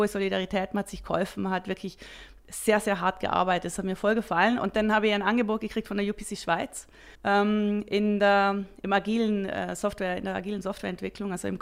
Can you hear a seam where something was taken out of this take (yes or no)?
yes